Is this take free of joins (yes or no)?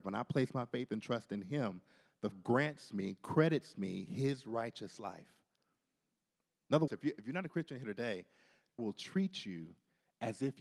no